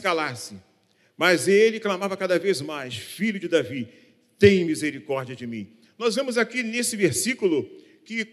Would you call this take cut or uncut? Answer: uncut